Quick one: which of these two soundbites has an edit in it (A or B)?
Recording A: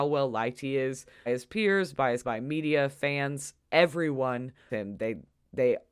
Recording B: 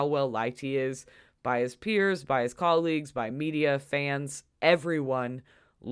A